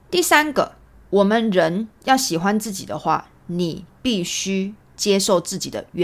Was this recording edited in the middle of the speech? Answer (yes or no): yes